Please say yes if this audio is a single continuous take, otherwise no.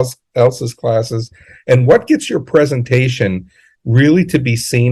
yes